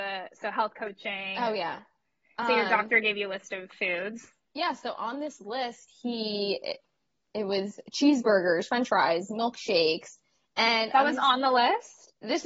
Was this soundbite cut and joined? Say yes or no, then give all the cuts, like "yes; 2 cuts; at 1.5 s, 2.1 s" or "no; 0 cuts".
no; 0 cuts